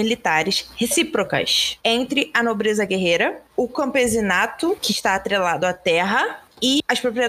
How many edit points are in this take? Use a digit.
0